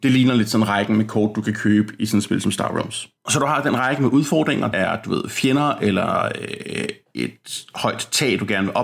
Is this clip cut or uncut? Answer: cut